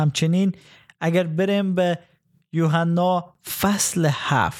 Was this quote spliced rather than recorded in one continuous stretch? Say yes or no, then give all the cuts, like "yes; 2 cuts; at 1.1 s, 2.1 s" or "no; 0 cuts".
no; 0 cuts